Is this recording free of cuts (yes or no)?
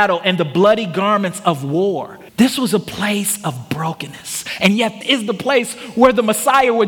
no